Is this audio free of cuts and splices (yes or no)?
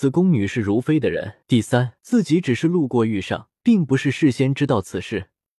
no